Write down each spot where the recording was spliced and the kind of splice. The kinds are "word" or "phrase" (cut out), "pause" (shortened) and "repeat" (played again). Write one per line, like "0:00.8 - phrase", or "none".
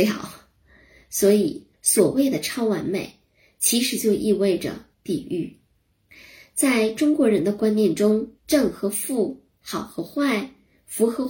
0:01.7 - pause
0:04.9 - pause
0:08.4 - pause